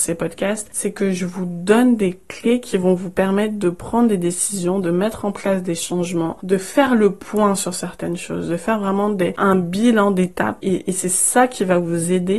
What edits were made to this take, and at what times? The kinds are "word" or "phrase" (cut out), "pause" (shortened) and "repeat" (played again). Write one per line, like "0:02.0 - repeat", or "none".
none